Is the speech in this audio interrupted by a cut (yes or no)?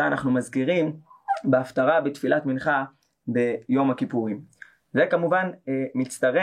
no